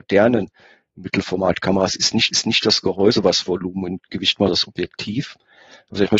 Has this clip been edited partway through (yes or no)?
yes